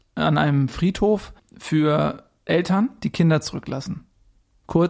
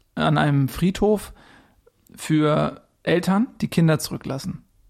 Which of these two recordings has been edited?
first; 1 cut; at 1.4 s

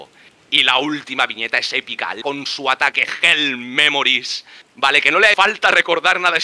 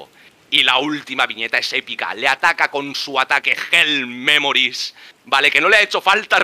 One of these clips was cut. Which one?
first; 2 cuts; at 2.2 s, 5.3 s

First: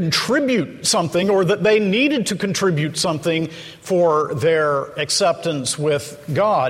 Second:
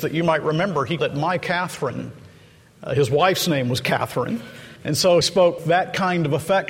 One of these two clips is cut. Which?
second; 4 cuts; at 1.0 s, 4.8 s, 5.2 s, 5.6 s

